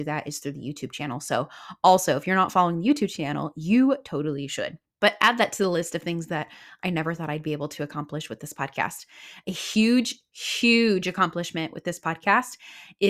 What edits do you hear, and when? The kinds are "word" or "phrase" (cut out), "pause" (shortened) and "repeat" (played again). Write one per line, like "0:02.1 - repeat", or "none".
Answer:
0:04.9 - pause